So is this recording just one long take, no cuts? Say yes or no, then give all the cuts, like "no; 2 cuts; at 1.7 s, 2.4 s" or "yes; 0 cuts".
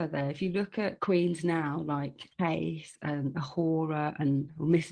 no; 1 cut; at 2.3 s